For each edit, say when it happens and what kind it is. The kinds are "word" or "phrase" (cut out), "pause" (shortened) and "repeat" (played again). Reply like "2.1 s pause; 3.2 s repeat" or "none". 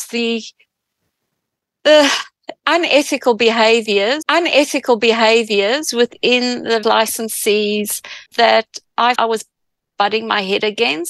4.2 s repeat; 6.8 s word; 8.3 s pause; 9.2 s word